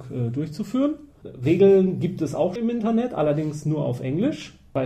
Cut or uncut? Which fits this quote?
cut